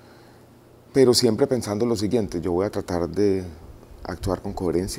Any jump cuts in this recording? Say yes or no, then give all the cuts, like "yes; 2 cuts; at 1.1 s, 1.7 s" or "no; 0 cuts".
no; 0 cuts